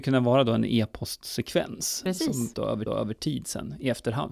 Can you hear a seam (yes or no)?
yes